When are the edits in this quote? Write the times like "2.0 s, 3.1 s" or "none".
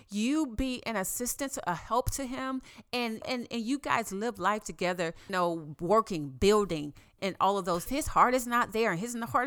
3.2 s, 5.3 s, 7.2 s, 7.9 s